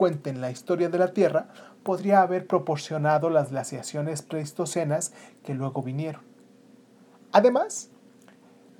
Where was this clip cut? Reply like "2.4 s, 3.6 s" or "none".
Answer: none